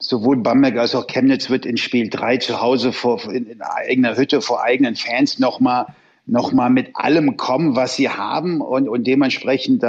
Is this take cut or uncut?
uncut